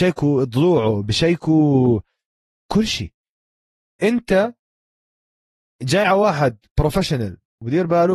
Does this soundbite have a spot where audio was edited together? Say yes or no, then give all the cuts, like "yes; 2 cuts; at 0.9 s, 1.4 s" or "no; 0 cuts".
no; 0 cuts